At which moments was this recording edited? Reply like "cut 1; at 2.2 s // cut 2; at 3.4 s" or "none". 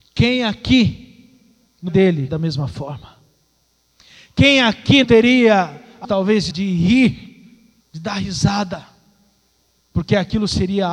cut 1; at 1.9 s // cut 2; at 2.3 s // cut 3; at 5.0 s // cut 4; at 6.0 s // cut 5; at 6.5 s // cut 6; at 7.8 s